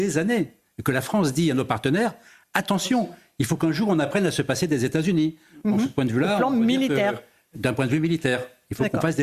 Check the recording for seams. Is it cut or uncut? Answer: uncut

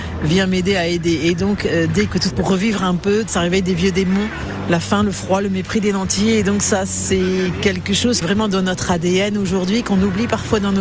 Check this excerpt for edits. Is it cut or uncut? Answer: cut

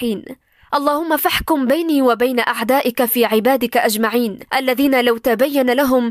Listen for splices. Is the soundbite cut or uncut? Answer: cut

